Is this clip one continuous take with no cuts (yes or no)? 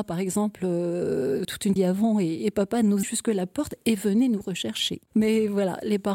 no